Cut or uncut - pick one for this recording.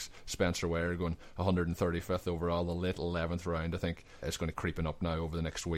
cut